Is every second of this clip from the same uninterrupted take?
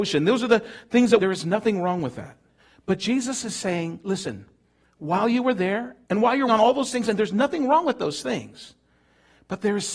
no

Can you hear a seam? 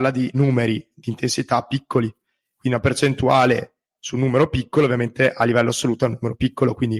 no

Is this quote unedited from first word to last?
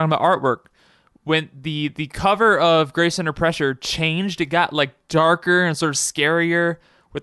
yes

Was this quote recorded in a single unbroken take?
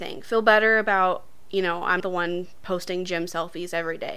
no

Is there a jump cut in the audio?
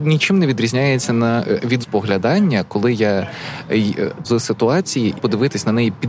yes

